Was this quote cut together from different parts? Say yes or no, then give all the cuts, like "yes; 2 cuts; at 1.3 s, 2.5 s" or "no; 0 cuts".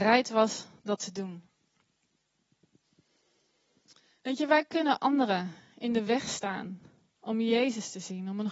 no; 0 cuts